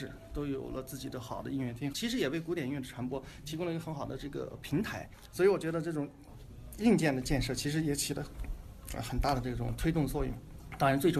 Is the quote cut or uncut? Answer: cut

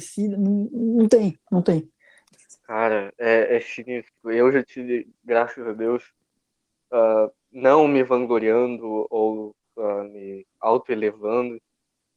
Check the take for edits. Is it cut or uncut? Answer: cut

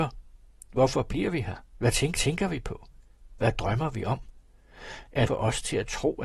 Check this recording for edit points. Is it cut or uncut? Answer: cut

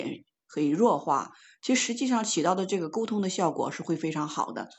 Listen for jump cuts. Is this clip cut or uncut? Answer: uncut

